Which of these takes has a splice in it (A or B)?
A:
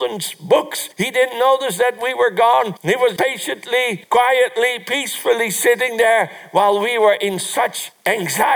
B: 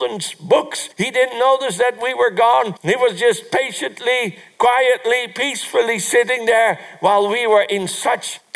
A